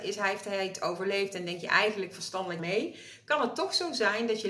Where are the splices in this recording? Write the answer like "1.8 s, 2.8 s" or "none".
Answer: 2.6 s